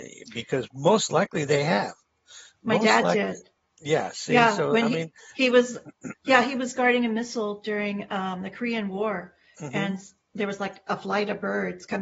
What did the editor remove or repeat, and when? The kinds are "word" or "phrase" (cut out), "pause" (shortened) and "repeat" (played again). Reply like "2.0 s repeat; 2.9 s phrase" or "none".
none